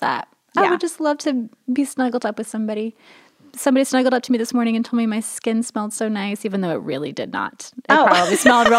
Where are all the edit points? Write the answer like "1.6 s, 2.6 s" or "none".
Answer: none

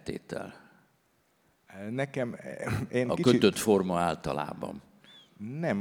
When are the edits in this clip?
none

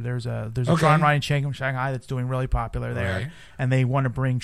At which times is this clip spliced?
none

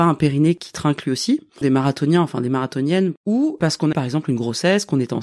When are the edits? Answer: 1.6 s, 3.9 s

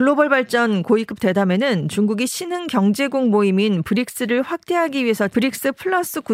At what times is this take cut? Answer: 5.3 s

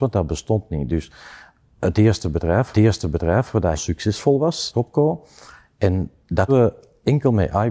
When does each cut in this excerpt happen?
2.7 s, 3.8 s, 4.7 s, 6.5 s

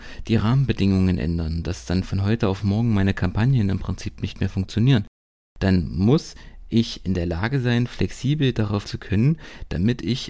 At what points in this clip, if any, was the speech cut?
8.8 s

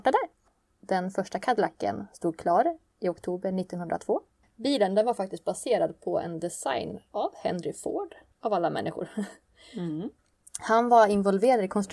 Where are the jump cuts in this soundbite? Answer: none

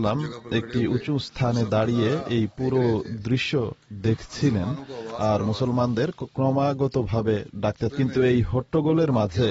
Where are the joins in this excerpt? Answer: 7.9 s

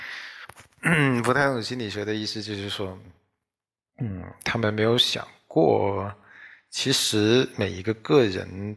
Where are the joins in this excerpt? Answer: none

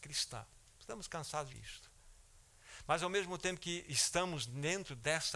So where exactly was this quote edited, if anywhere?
1.5 s

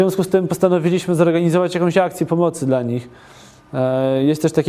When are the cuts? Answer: none

